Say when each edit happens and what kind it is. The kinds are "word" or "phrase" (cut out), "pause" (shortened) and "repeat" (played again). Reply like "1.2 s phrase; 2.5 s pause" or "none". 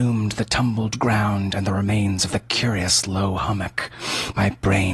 none